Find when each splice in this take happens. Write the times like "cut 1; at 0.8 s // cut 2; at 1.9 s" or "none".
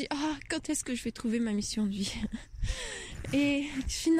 none